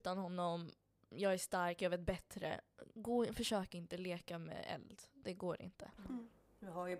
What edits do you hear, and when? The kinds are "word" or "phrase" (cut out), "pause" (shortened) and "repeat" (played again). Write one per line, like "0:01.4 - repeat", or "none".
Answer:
none

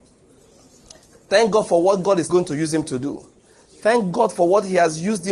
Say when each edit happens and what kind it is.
0:02.3 - word

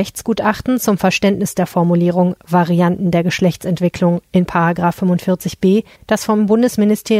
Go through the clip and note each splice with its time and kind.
0:05.9 - pause

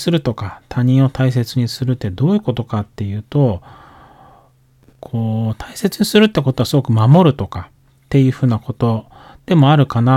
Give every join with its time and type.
none

